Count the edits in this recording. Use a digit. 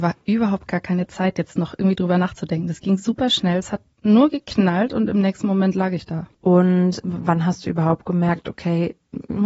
1